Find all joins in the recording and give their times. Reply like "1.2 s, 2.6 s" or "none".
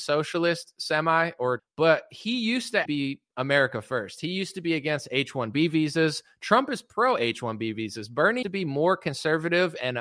1.6 s, 2.9 s, 8.4 s